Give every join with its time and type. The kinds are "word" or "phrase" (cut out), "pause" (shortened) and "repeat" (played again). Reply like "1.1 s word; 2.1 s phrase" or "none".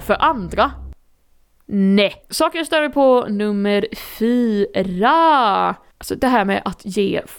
2.2 s pause